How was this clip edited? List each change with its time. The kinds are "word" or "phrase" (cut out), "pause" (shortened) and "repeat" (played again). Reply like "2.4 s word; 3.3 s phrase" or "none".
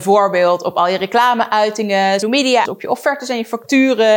2.2 s word; 2.6 s word